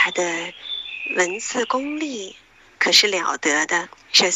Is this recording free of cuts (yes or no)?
yes